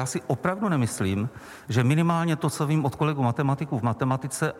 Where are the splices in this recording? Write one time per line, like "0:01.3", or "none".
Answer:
none